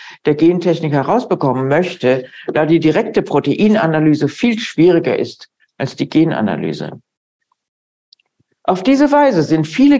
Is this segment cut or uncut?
uncut